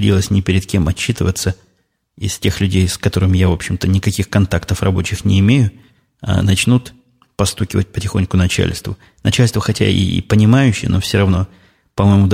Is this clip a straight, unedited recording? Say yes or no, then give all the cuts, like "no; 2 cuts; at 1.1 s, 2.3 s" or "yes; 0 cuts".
yes; 0 cuts